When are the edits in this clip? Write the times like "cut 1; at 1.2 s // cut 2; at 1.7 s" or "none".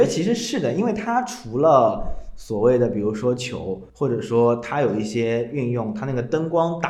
cut 1; at 3.9 s